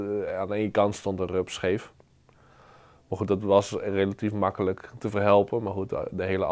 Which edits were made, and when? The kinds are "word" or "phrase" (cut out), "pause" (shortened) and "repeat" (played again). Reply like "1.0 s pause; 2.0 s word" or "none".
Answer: none